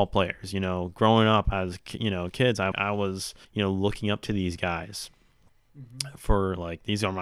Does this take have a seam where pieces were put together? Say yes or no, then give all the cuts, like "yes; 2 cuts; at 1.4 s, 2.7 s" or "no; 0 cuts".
yes; 2 cuts; at 2.7 s, 3.4 s